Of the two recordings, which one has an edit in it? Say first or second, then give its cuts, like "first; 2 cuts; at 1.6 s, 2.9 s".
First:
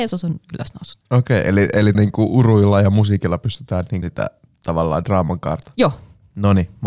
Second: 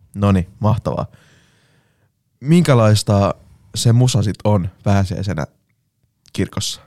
first; 3 cuts; at 1.0 s, 1.9 s, 4.0 s